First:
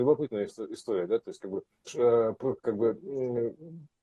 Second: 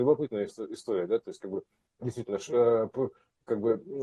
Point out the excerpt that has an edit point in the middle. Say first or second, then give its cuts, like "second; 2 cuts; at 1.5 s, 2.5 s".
first; 2 cuts; at 1.9 s, 2.6 s